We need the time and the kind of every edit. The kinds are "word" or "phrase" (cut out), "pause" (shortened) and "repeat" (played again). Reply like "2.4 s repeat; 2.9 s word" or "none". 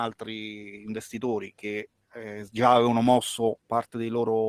none